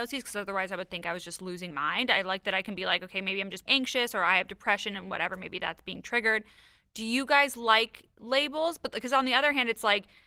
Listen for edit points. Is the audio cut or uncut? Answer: cut